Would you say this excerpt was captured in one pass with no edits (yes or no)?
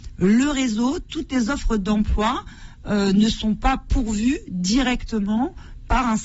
yes